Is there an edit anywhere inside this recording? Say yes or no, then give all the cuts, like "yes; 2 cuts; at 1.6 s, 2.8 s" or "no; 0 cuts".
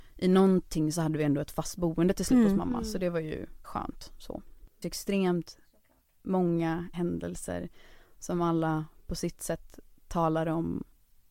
yes; 3 cuts; at 3.6 s, 4.8 s, 6.9 s